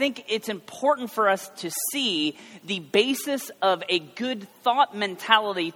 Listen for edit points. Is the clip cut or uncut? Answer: uncut